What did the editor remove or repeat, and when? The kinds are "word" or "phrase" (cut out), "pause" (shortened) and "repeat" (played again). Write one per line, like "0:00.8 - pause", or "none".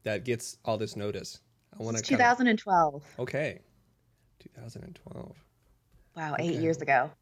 none